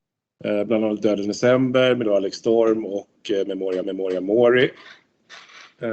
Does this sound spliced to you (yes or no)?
yes